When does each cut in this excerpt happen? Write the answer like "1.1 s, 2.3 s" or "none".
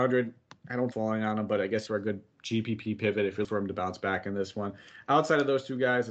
0.9 s, 1.9 s, 3.4 s